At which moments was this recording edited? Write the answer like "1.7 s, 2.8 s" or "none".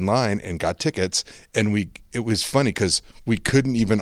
none